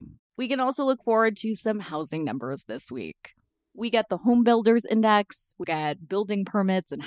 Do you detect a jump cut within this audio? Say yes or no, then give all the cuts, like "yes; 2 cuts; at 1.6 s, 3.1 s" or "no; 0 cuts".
yes; 1 cut; at 5.6 s